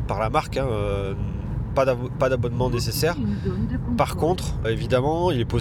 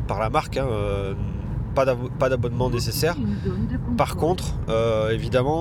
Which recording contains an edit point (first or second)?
first